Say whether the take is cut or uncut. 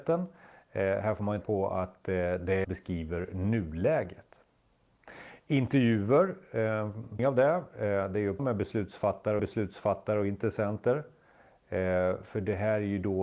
cut